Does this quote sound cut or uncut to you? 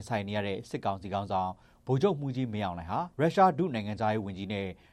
cut